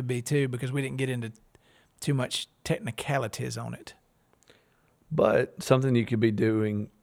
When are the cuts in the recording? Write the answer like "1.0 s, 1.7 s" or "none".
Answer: none